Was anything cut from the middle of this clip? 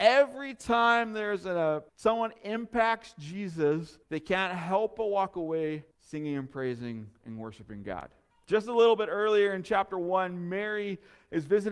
yes; 4 cuts; at 1.9 s, 4.0 s, 5.9 s, 8.3 s

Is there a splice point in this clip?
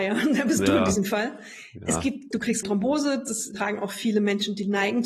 yes; 3 cuts; at 2.3 s, 2.6 s, 3.5 s

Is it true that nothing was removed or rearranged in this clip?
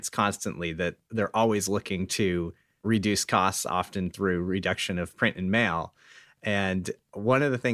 yes; 0 cuts

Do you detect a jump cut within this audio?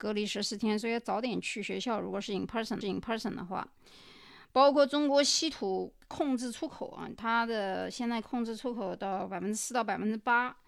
yes; 2 cuts; at 2.8 s, 6.0 s

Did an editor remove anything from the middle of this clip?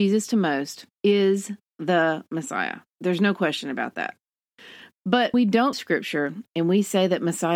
yes; 4 cuts; at 0.9 s, 2.9 s, 5.3 s, 5.7 s

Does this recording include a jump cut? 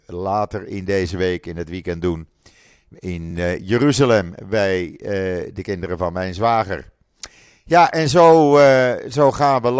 no; 0 cuts

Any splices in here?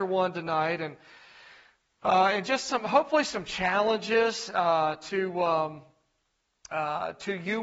no; 0 cuts

